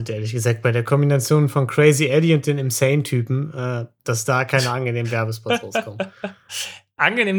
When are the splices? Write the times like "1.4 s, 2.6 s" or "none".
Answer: none